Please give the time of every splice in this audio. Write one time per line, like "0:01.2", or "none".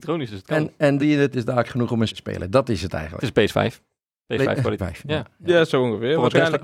0:01.0
0:01.3
0:01.7
0:02.1
0:04.0
0:04.8